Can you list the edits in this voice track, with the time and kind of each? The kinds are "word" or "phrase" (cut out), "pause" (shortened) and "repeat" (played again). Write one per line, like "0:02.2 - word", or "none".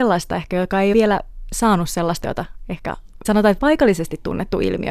0:00.9 - word
0:02.2 - word
0:03.2 - word
0:03.6 - phrase